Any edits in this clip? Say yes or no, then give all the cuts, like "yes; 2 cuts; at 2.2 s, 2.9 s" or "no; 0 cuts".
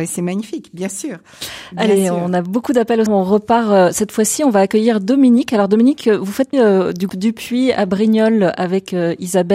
yes; 3 cuts; at 3.1 s, 6.5 s, 7.1 s